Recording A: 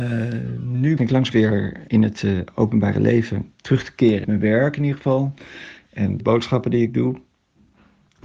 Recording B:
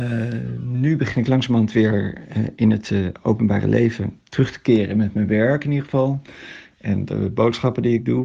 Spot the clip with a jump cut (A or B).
A